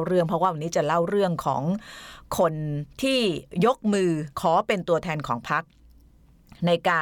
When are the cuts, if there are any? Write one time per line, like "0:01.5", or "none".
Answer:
0:02.9
0:04.3

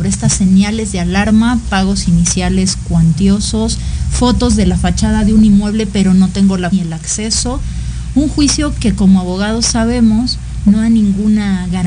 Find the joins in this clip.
0:06.7

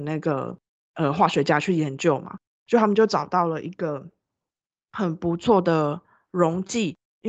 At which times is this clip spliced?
none

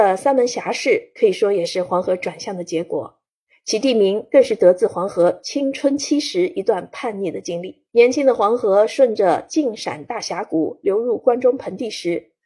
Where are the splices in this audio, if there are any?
0:07.9

